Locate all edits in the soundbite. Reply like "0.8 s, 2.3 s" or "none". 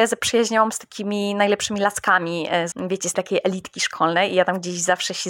2.7 s, 3.1 s